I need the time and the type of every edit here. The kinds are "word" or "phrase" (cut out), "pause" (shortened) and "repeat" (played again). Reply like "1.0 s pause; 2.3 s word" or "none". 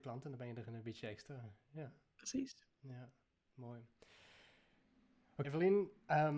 5.4 s word